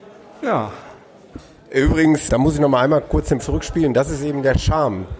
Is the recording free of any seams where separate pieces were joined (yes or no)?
no